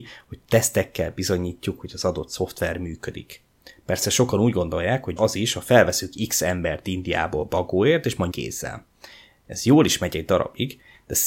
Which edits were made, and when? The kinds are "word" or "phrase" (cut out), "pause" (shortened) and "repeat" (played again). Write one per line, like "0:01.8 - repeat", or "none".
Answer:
0:05.2 - word
0:08.3 - word